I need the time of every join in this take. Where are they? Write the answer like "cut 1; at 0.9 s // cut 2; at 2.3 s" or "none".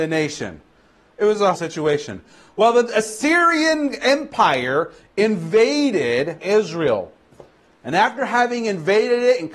cut 1; at 1.5 s // cut 2; at 6.4 s